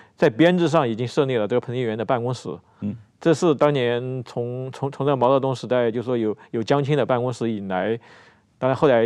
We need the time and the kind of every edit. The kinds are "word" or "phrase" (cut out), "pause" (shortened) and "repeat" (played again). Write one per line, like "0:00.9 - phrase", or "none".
none